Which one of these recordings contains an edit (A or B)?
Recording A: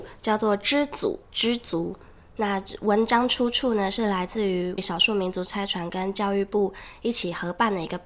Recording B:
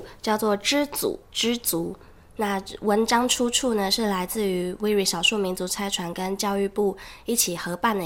A